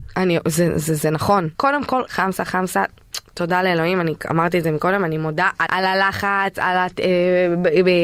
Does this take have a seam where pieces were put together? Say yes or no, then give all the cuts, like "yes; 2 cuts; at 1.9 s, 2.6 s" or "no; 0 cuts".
yes; 3 cuts; at 1.5 s, 2.1 s, 5.7 s